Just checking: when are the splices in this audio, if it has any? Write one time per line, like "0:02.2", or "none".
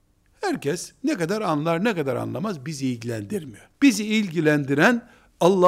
0:03.7

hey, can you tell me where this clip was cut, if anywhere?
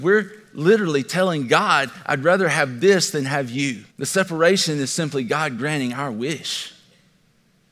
0:03.9

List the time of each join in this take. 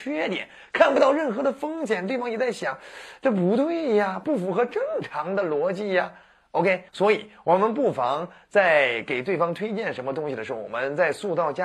0:06.9

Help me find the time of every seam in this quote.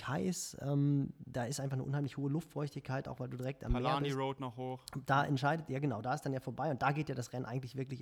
none

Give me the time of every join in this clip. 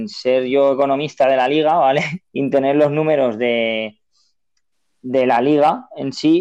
0:02.2

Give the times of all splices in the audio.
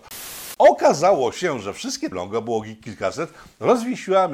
0:02.1

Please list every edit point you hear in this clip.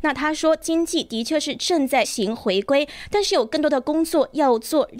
0:02.0

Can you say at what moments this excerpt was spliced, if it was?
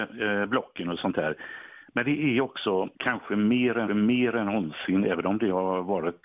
0:02.9
0:03.9

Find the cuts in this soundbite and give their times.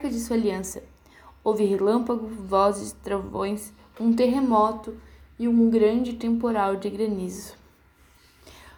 none

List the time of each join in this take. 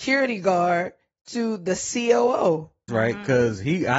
0:02.9

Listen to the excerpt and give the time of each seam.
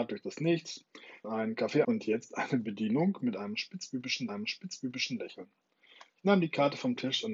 0:01.2
0:01.8
0:04.3

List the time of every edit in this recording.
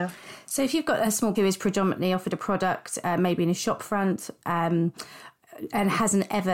0:01.3

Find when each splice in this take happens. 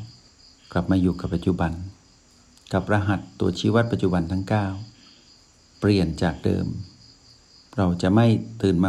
none

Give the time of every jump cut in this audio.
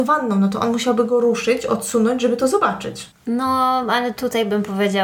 none

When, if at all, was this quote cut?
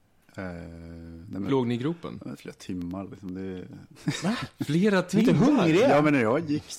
0:01.5

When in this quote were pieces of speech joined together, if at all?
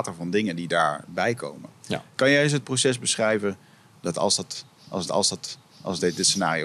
0:05.1

